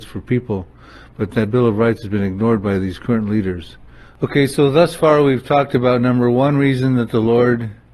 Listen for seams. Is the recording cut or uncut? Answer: uncut